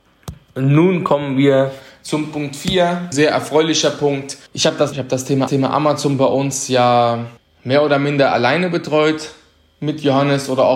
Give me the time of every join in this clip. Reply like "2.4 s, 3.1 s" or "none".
3.1 s, 4.5 s, 4.9 s, 5.5 s, 7.4 s

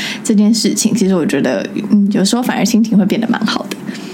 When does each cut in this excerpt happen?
none

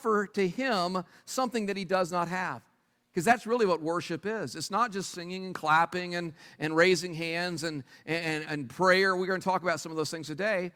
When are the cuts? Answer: none

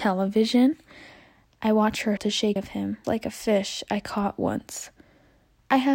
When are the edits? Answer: 2.2 s, 2.6 s, 3.0 s

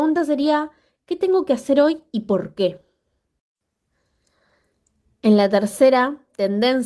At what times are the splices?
none

